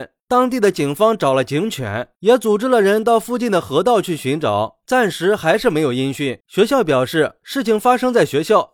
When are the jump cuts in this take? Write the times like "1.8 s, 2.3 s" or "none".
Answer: 6.4 s

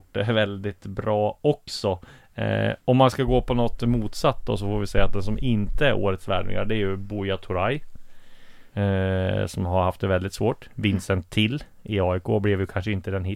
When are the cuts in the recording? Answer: 8.7 s

